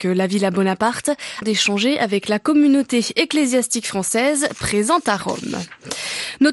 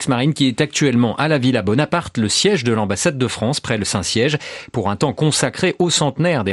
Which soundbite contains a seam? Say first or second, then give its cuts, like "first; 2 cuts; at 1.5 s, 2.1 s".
first; 1 cut; at 1.4 s